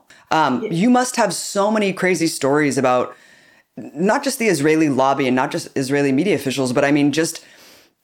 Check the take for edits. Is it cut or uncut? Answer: uncut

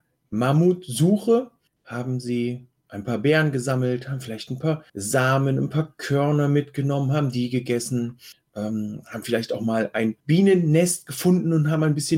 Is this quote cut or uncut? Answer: cut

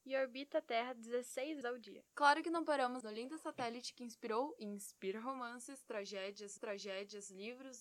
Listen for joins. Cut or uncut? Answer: cut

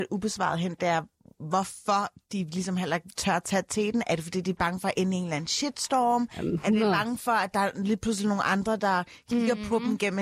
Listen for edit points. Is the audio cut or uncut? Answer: uncut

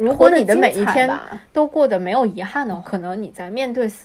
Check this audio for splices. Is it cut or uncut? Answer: cut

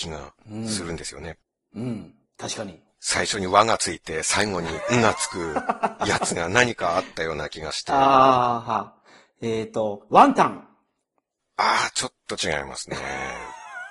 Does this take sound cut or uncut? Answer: uncut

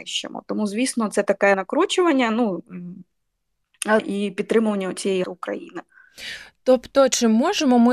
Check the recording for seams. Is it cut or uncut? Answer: cut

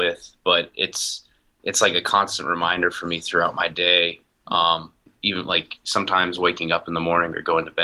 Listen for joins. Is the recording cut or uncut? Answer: uncut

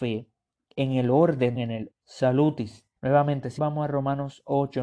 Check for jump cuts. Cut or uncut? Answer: cut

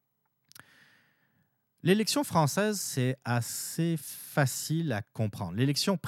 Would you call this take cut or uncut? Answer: uncut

